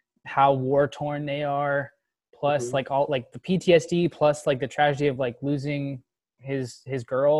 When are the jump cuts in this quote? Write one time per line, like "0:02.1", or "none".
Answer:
none